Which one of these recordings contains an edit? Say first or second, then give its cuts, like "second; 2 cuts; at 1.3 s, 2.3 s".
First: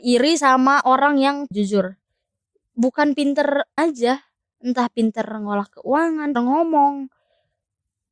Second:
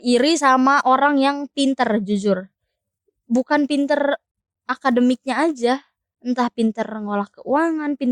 first; 3 cuts; at 1.5 s, 3.8 s, 6.3 s